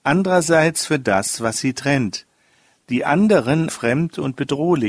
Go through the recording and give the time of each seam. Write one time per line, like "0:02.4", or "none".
0:03.7